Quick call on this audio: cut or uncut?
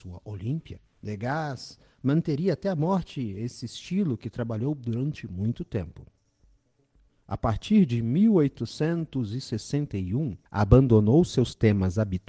cut